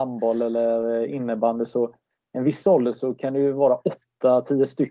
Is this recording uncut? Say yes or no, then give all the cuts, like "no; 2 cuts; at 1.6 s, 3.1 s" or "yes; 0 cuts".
yes; 0 cuts